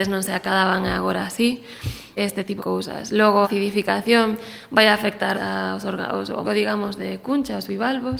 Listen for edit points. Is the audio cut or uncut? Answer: cut